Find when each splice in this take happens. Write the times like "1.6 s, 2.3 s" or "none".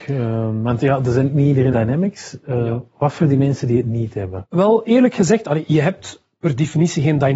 1.7 s